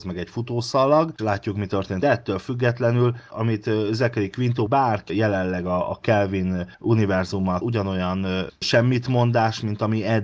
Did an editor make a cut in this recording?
yes; 6 cuts; at 1.2 s, 2.0 s, 3.3 s, 4.7 s, 5.1 s, 7.6 s

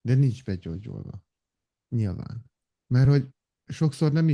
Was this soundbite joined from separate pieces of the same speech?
no; 0 cuts

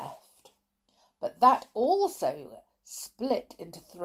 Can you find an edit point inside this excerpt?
no; 0 cuts

